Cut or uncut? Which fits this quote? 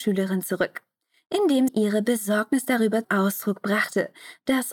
cut